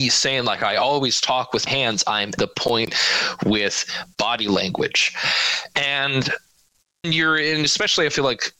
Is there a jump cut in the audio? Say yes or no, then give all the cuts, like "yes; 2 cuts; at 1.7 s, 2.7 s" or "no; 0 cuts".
yes; 3 cuts; at 1.7 s, 2.4 s, 7.0 s